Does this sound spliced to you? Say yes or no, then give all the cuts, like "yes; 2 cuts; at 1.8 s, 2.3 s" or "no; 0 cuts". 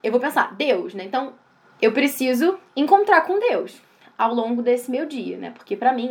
no; 0 cuts